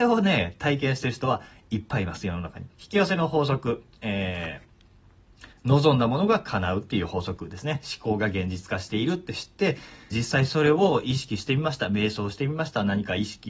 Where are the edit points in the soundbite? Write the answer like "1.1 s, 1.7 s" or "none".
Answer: 2.7 s, 10.1 s